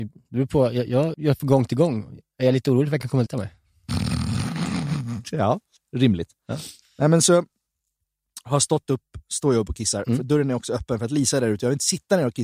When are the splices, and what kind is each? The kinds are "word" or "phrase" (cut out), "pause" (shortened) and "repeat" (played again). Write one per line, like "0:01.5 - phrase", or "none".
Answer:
0:01.1 - word
0:03.3 - word
0:05.8 - pause
0:06.8 - pause
0:09.2 - pause